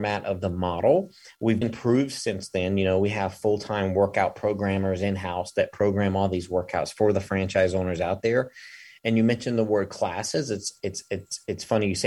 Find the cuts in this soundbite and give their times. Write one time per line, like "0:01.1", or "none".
0:01.6